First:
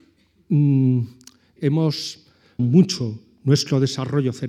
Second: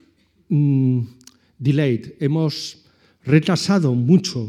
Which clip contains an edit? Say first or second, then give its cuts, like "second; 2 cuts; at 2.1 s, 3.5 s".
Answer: first; 2 cuts; at 1.6 s, 2.6 s